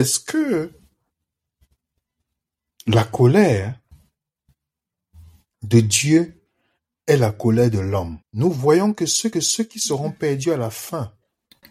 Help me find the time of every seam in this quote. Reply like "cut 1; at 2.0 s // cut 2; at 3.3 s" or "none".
cut 1; at 8.2 s // cut 2; at 9.3 s